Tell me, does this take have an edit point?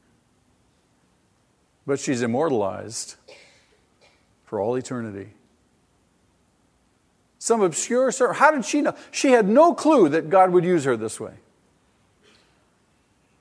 no; 0 cuts

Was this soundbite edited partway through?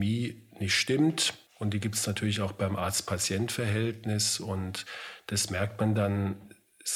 yes; 1 cut; at 1.5 s

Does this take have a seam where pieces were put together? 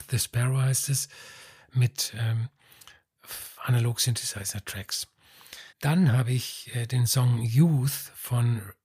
yes; 2 cuts; at 3.6 s, 5.7 s

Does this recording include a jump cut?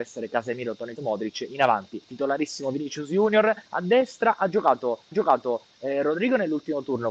yes; 4 cuts; at 1.0 s, 2.0 s, 3.7 s, 5.1 s

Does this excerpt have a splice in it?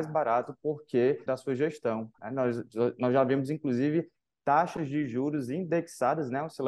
yes; 1 cut; at 1.3 s

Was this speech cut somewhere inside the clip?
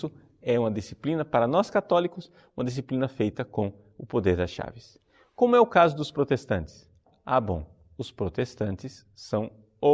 no; 0 cuts

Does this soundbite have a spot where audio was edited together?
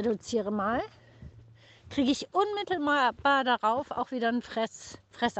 no; 0 cuts

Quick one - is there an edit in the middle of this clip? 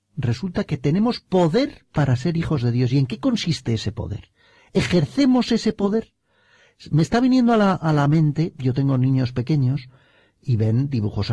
no; 0 cuts

